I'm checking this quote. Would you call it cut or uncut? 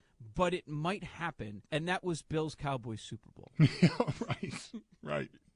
cut